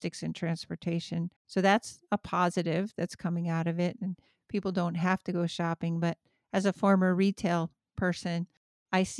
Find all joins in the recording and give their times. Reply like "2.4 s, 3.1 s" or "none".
1.4 s

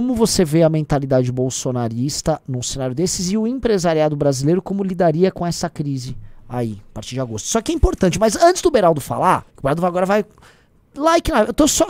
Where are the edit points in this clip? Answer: 9.5 s

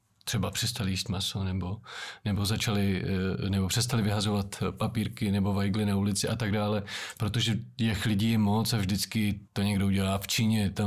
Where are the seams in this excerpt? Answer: 9.5 s

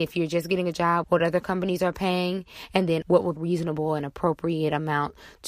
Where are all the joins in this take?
1.0 s, 3.0 s, 3.4 s

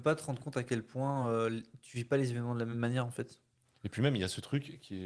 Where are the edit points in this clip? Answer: none

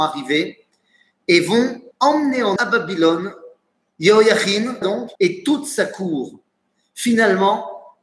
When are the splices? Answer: 1.9 s, 2.6 s, 4.8 s, 5.1 s

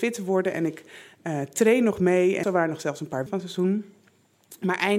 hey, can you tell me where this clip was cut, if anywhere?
2.4 s, 3.3 s

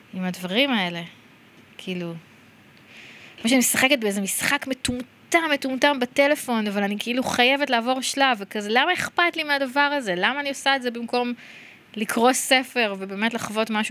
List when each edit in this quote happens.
none

